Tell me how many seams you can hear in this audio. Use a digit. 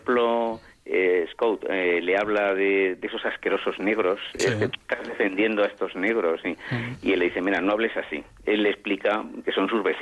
1